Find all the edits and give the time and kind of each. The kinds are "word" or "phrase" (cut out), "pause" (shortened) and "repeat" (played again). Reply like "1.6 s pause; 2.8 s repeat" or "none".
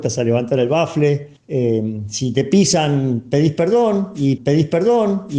1.4 s pause; 4.4 s repeat